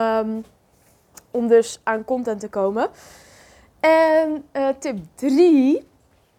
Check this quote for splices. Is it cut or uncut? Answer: uncut